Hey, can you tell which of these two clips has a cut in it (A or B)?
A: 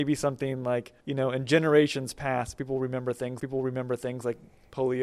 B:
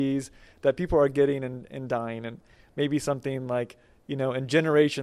A